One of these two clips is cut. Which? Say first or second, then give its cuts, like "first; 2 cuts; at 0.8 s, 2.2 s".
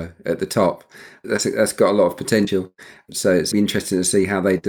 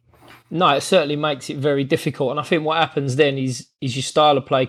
first; 2 cuts; at 1.2 s, 3.5 s